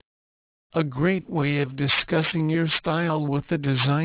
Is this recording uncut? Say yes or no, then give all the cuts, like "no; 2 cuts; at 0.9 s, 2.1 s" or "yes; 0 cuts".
yes; 0 cuts